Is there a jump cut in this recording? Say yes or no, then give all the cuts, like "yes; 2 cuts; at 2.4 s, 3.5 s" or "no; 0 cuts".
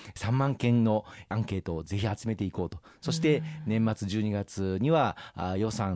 no; 0 cuts